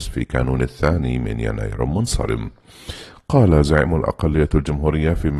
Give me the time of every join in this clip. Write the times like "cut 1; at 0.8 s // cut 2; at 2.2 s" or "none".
none